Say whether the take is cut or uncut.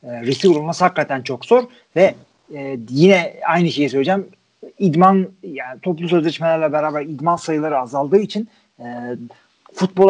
uncut